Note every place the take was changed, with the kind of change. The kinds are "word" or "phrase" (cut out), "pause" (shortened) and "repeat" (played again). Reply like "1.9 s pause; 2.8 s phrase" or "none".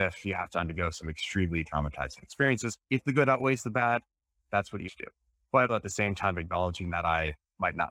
1.7 s word; 2.8 s pause; 4.9 s word; 5.7 s word